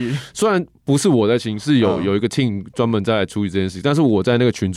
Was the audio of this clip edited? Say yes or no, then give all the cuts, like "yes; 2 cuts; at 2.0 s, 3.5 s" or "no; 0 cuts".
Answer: no; 0 cuts